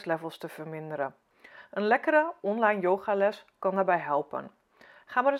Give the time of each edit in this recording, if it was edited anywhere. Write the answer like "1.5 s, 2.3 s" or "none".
none